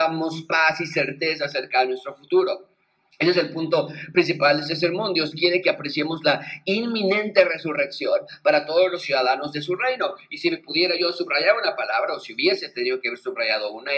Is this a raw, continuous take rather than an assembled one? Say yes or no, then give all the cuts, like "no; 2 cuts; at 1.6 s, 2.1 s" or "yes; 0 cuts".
yes; 0 cuts